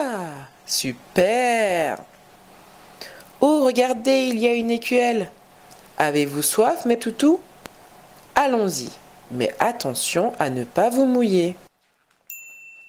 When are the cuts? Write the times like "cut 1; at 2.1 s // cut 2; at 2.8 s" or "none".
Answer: cut 1; at 7.0 s